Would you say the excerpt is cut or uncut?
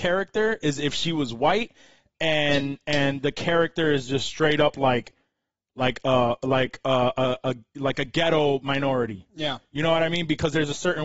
uncut